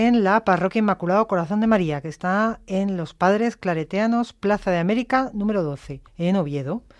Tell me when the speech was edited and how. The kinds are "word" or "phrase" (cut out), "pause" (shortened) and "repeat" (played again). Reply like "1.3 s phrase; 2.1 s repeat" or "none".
6.1 s pause